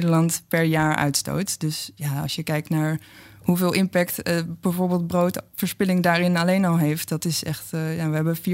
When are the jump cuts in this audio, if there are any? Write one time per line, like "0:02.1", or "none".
none